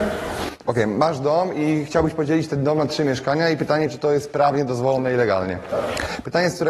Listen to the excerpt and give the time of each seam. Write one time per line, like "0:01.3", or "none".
none